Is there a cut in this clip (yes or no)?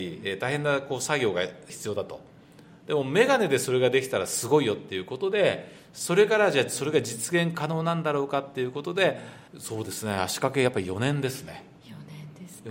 yes